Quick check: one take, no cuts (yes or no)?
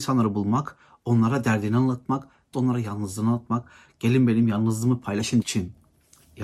no